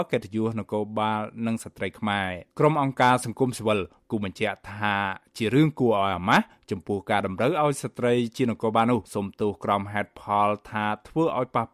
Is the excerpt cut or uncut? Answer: cut